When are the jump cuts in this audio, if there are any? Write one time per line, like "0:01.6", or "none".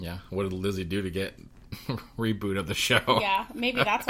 0:01.5